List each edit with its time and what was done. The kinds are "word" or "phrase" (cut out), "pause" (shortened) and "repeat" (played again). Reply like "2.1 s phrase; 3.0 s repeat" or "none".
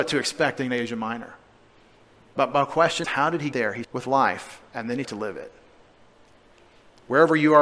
3.0 s word; 3.5 s word; 3.8 s word; 5.0 s word